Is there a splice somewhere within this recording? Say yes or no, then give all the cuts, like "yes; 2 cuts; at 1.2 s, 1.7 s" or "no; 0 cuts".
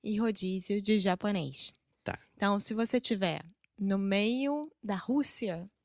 no; 0 cuts